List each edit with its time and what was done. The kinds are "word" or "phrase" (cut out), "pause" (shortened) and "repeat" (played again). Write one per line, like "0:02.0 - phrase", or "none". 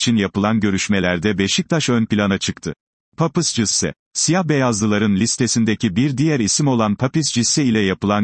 none